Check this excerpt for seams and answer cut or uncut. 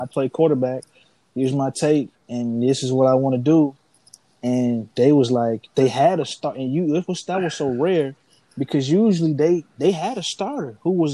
uncut